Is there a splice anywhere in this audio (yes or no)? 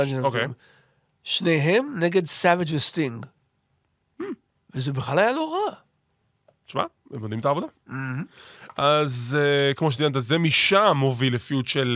no